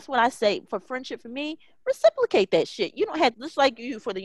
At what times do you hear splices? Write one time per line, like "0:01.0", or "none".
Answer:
0:03.3

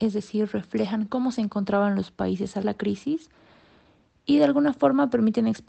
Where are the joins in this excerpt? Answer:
0:02.6

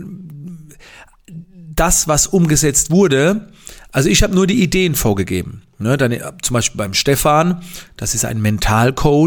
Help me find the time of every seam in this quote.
none

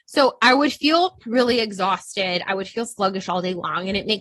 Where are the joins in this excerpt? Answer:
none

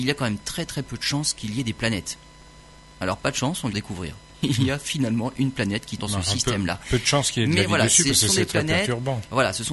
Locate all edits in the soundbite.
0:03.7
0:06.0

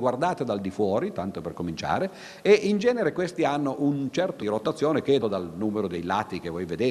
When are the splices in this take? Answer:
0:04.4
0:05.2

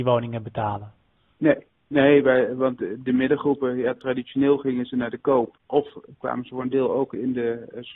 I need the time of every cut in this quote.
none

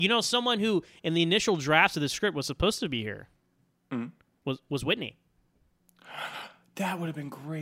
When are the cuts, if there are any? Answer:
none

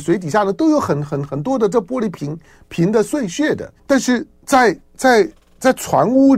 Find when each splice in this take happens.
0:03.8

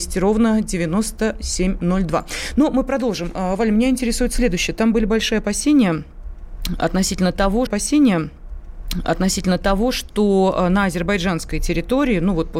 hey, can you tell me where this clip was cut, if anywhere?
0:07.7

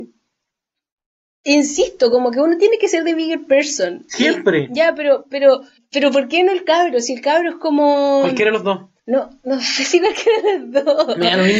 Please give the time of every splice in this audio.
0:05.8
0:09.0

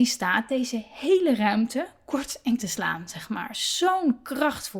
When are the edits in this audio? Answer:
0:02.6

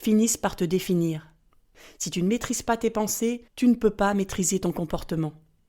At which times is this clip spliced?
0:03.5

